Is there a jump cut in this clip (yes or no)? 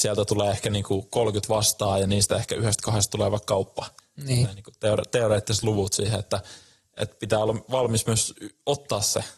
no